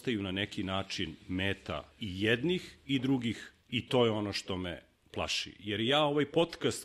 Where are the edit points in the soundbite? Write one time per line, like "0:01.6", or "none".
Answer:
0:01.9
0:03.6